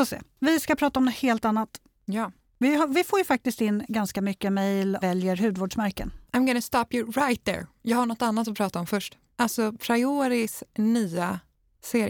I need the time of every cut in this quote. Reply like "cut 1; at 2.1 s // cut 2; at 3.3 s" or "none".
cut 1; at 5.0 s // cut 2; at 6.3 s